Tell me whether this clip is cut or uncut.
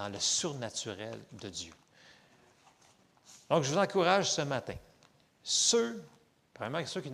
uncut